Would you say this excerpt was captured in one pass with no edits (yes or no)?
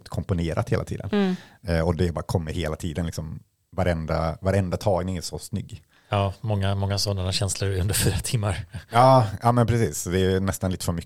yes